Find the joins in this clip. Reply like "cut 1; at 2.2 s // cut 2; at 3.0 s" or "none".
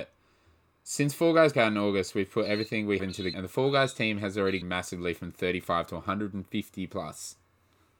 cut 1; at 1.5 s // cut 2; at 3.0 s // cut 3; at 3.3 s // cut 4; at 4.6 s